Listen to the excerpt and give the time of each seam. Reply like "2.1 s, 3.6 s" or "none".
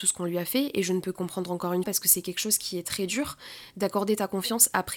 1.2 s, 1.8 s